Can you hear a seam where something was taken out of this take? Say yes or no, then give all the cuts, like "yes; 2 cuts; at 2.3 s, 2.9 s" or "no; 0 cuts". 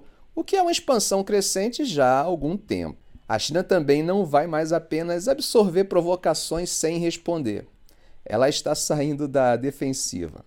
no; 0 cuts